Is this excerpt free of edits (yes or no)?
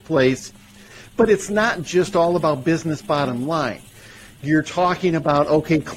yes